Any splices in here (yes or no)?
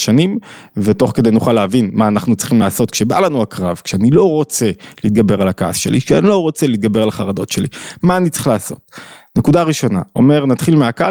no